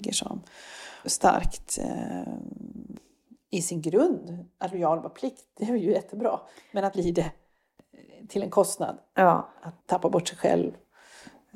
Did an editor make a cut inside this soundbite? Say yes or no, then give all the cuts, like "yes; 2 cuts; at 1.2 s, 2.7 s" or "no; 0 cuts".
yes; 4 cuts; at 1.0 s, 5.6 s, 6.9 s, 9.8 s